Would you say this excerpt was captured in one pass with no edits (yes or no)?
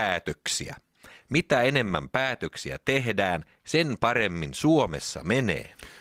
yes